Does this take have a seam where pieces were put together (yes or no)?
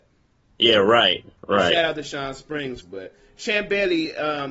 yes